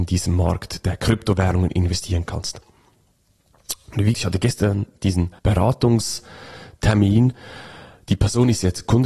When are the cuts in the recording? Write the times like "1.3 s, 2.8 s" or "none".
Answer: 4.1 s, 5.4 s